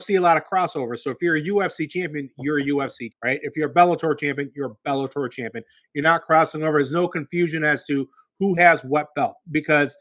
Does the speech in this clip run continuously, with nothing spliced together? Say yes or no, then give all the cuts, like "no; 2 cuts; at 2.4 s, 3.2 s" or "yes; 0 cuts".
no; 1 cut; at 3.1 s